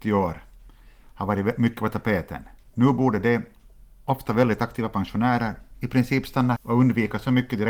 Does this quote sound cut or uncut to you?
cut